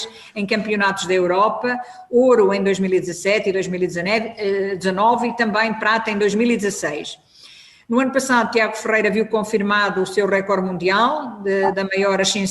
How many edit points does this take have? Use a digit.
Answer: 0